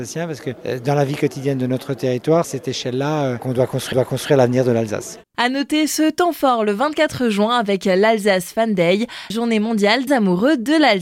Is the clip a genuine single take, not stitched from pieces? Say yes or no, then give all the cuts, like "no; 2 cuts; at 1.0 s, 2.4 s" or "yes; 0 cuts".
no; 5 cuts; at 2.4 s, 3.4 s, 3.9 s, 9.3 s, 10.1 s